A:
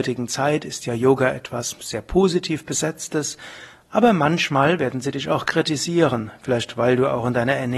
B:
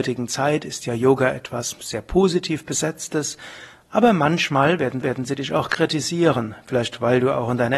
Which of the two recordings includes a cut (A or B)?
B